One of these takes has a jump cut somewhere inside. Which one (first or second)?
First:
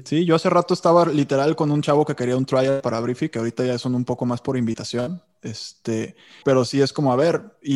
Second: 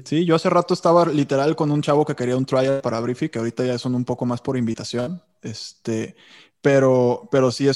first